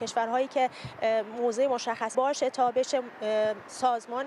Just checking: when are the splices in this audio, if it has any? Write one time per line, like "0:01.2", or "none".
0:02.1